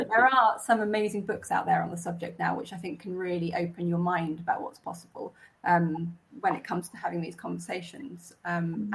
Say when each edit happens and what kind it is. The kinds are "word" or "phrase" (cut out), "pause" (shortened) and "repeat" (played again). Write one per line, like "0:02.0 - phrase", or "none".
none